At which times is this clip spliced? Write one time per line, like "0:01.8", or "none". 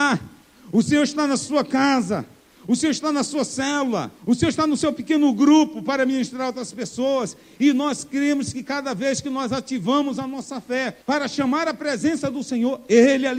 0:04.2
0:11.0